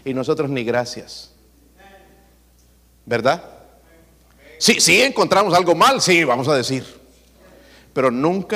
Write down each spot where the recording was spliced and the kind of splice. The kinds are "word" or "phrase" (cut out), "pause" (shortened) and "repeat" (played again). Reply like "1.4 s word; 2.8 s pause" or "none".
none